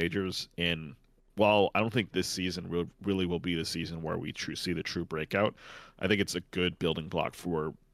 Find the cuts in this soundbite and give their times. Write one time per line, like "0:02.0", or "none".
none